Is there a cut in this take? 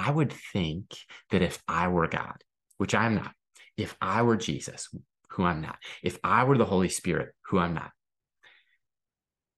no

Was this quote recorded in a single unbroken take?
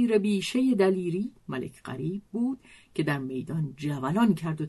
yes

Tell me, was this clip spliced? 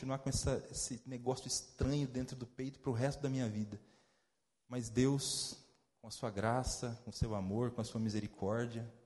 no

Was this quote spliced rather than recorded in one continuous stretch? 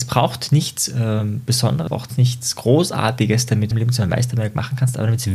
yes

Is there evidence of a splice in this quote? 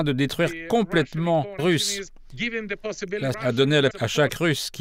yes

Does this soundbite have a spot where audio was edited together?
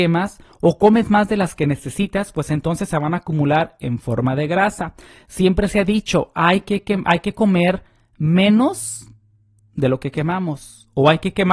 no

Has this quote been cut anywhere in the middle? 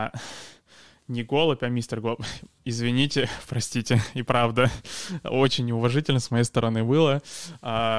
no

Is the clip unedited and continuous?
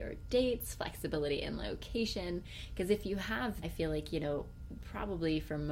no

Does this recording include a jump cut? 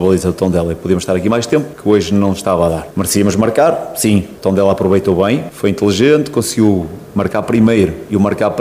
no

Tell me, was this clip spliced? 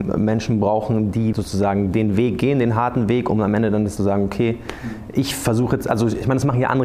yes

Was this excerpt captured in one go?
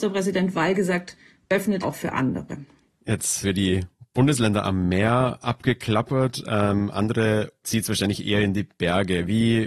no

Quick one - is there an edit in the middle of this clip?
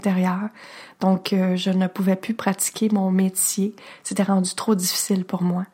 no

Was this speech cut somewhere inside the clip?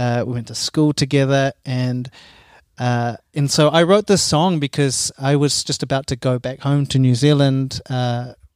no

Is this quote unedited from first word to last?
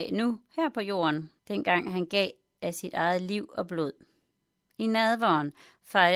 no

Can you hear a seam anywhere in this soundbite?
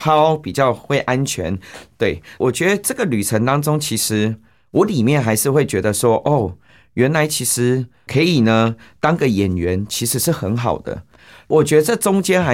no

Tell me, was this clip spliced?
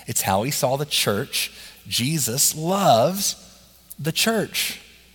no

